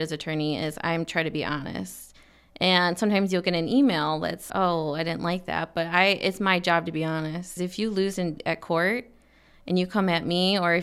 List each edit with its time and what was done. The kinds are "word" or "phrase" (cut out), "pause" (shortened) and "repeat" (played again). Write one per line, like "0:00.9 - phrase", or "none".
0:04.5 - word
0:07.6 - word

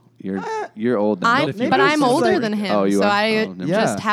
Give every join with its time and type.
0:01.4 - word

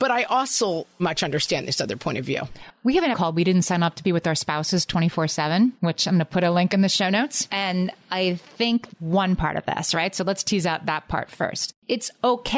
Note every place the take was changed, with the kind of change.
0:01.0 - word
0:03.1 - word
0:05.8 - pause
0:08.9 - word

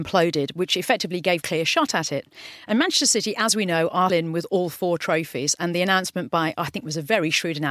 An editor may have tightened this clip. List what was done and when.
0:01.4 - phrase
0:04.1 - word

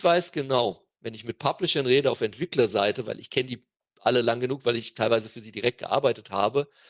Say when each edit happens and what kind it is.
none

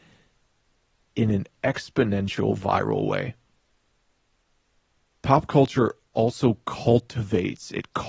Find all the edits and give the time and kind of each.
none

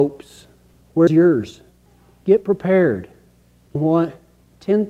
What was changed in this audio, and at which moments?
0:01.1 - word
0:03.7 - word

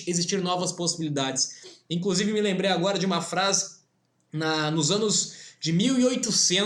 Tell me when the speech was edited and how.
none

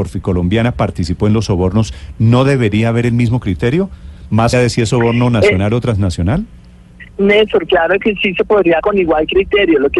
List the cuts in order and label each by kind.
0:04.5 - word
0:07.1 - pause
0:08.8 - word

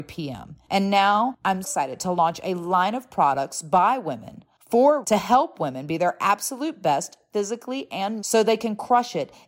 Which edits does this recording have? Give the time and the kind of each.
0:01.6 - word
0:05.0 - word
0:08.2 - word

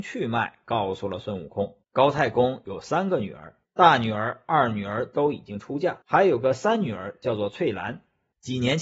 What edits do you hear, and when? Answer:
0:01.8 - pause
0:03.6 - pause
0:06.0 - pause

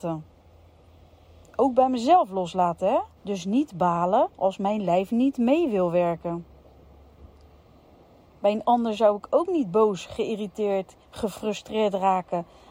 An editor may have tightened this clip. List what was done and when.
0:03.2 - pause
0:04.3 - pause
0:11.0 - pause

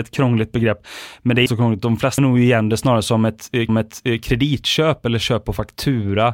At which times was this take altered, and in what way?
0:01.5 - phrase
0:02.2 - word
0:03.7 - repeat

